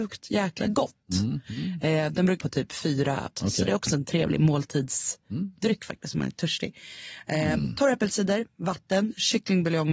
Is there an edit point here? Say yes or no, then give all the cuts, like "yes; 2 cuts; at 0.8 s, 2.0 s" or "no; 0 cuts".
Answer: yes; 2 cuts; at 2.4 s, 3.3 s